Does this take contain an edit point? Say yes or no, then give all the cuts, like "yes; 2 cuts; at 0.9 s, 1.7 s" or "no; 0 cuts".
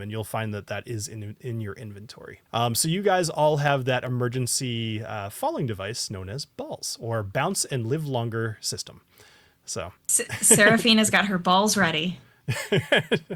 yes; 2 cuts; at 2.5 s, 10.0 s